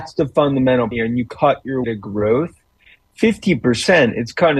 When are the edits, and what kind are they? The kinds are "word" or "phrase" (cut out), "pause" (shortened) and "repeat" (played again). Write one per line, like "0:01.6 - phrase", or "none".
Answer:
0:00.9 - word
0:01.3 - word
0:01.8 - word